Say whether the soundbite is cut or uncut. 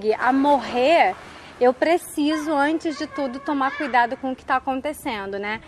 uncut